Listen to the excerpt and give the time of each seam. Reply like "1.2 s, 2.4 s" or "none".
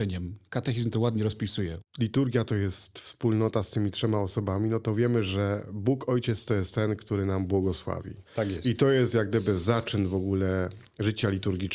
1.9 s, 8.3 s